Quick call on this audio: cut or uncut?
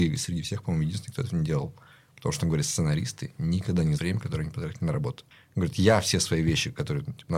cut